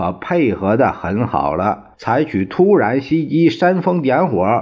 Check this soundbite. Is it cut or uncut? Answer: cut